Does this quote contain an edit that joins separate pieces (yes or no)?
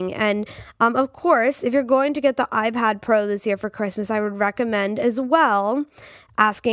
no